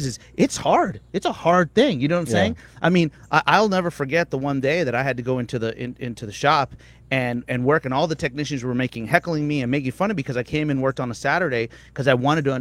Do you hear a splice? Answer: no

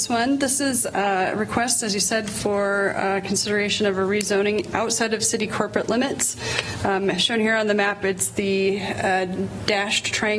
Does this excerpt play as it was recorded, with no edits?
yes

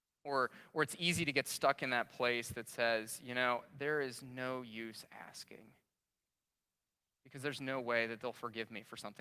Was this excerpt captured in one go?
yes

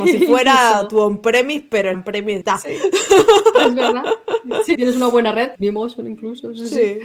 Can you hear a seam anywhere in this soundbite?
yes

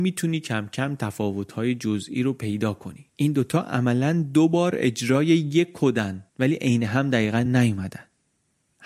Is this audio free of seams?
no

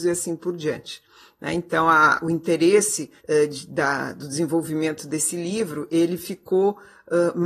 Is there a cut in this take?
yes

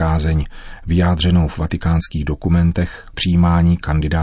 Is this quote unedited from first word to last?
no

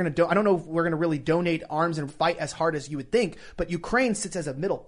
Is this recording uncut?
no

